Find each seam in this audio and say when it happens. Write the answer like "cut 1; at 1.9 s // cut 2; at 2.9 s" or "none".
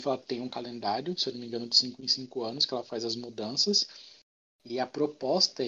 none